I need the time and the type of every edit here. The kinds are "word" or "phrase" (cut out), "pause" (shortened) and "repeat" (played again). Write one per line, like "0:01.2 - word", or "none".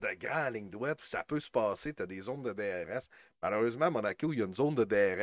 none